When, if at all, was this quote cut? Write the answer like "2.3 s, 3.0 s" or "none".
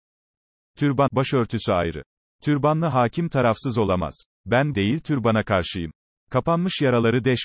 1.1 s, 4.7 s